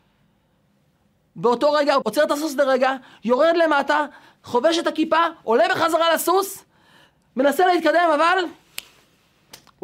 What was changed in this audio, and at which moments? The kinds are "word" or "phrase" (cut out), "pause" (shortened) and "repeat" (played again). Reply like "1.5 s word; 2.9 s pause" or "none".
2.0 s phrase